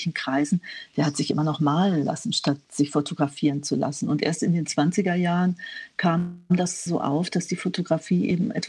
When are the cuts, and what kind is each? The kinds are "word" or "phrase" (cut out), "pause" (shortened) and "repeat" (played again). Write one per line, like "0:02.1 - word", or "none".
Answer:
0:06.9 - word